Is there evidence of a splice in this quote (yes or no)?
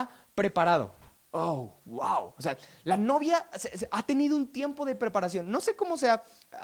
no